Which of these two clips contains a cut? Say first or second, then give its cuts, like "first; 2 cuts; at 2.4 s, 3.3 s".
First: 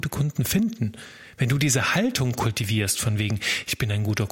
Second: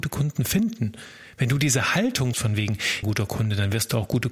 second; 2 cuts; at 2.3 s, 3.0 s